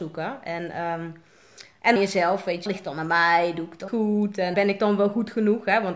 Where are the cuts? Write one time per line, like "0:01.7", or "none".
0:02.0
0:02.7
0:03.9
0:04.5